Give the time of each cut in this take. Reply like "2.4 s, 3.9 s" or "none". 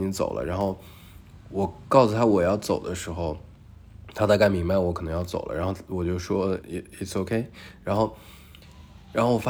6.6 s

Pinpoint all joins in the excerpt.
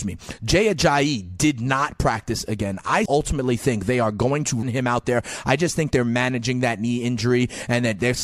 3.1 s, 4.6 s

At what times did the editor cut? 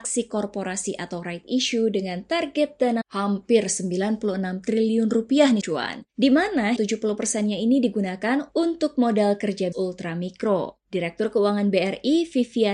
3.0 s, 5.6 s, 6.1 s, 6.8 s, 9.7 s, 10.8 s

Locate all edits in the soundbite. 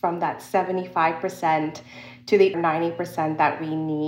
2.5 s

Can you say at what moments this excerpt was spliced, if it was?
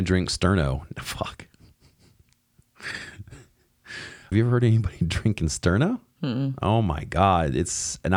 4.3 s

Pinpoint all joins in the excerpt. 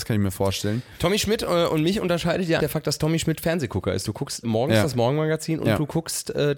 2.6 s, 4.4 s

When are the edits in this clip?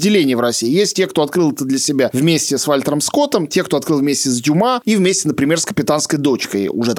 none

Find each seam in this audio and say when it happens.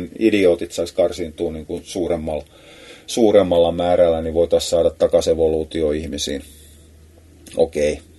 none

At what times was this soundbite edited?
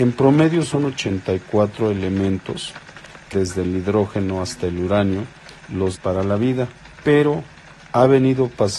3.3 s, 6.0 s, 6.9 s

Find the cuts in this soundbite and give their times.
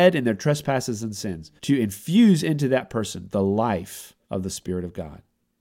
1.6 s, 4.2 s

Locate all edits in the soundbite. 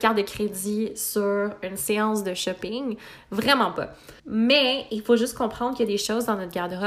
4.2 s

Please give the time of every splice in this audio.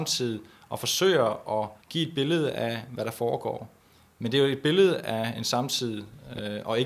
1.8 s

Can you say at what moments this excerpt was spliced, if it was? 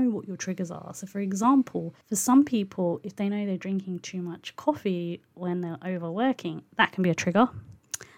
2.0 s

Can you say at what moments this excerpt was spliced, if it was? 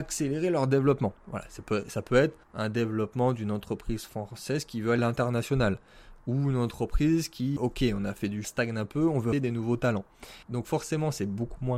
1.2 s, 2.4 s, 5.0 s, 7.6 s, 8.4 s, 9.3 s, 10.4 s

